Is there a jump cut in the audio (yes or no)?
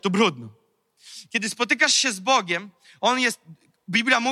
no